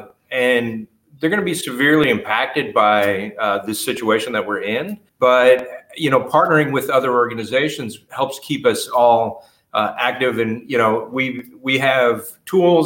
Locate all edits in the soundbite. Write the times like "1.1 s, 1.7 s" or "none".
5.1 s